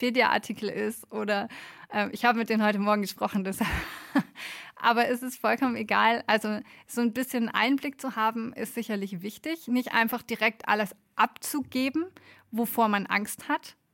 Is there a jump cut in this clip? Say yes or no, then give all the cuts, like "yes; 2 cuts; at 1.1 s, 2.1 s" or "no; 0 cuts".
no; 0 cuts